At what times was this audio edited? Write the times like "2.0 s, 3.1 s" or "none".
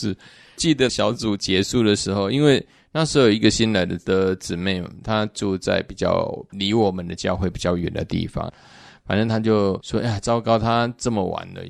none